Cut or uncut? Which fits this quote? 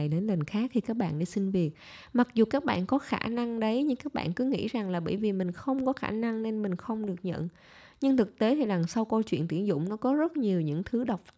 uncut